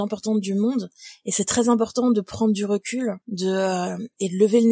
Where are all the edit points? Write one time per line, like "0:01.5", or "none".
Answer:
0:03.2